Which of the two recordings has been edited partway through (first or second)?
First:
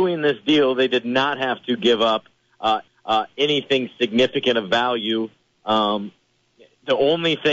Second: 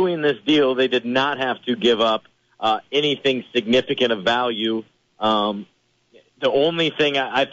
first